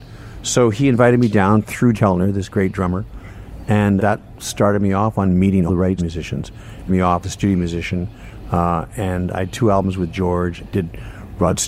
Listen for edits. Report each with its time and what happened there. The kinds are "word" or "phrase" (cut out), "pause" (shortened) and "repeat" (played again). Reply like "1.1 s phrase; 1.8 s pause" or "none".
1.9 s word; 4.0 s word; 5.7 s word; 6.0 s word; 6.9 s word; 7.2 s word; 9.5 s word; 10.6 s word